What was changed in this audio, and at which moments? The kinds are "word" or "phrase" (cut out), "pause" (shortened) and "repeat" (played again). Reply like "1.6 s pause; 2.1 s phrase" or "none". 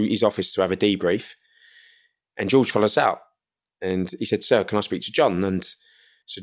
none